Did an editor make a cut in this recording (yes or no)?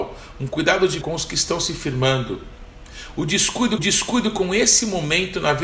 yes